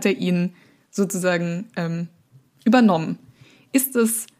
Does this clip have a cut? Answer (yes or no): no